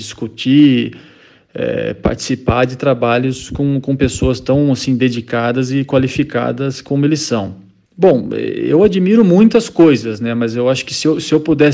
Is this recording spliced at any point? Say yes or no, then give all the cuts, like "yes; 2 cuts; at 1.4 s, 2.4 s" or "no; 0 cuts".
no; 0 cuts